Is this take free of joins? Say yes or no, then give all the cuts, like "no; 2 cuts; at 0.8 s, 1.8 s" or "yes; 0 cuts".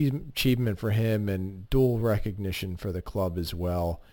yes; 0 cuts